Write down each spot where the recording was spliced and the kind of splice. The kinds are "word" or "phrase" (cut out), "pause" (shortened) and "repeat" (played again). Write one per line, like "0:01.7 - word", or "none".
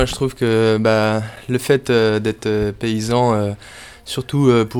none